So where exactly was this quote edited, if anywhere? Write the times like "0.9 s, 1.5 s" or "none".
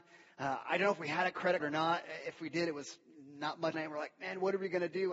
1.6 s, 3.7 s